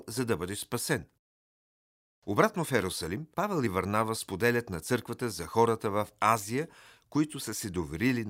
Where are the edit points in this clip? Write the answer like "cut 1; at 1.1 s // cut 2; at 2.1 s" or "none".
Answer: cut 1; at 3.3 s